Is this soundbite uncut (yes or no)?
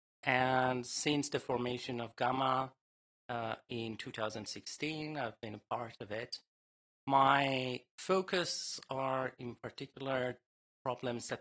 yes